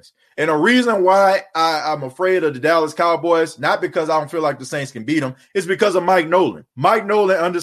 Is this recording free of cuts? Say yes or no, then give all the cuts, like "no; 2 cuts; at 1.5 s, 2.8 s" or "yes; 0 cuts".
no; 1 cut; at 6.7 s